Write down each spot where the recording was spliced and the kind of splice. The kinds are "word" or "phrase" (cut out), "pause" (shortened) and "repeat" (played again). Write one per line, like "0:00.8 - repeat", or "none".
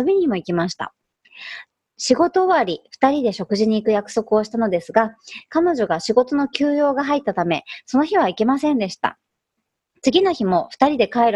none